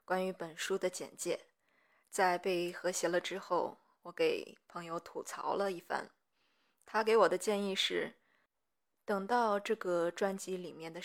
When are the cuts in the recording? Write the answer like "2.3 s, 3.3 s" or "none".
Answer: none

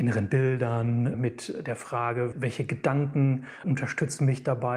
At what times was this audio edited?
none

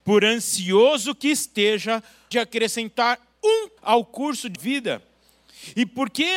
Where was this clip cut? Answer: 2.3 s, 3.8 s, 4.6 s

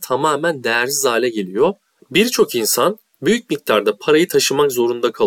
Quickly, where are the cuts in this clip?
none

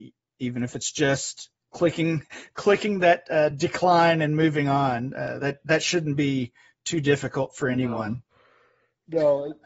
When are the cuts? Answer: none

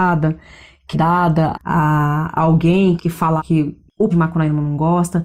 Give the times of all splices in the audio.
0.9 s, 1.5 s, 3.0 s, 3.4 s, 4.1 s

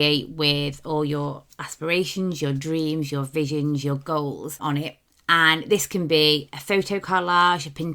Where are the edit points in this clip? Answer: none

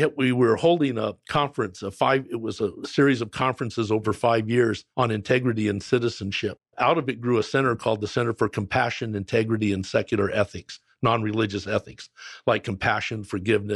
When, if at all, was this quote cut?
4.9 s, 6.7 s

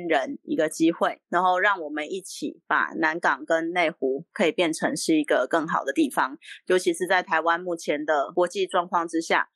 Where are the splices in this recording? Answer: 1.2 s

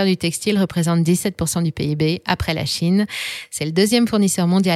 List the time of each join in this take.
none

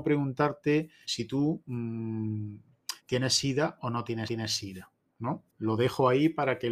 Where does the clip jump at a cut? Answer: 1.0 s, 3.0 s, 4.3 s, 5.5 s

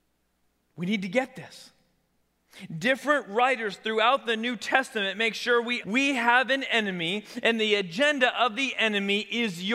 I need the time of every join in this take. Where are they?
5.8 s

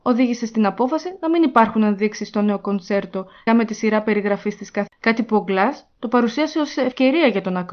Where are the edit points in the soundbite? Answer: 3.5 s, 4.9 s

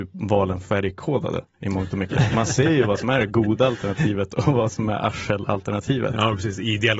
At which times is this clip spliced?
none

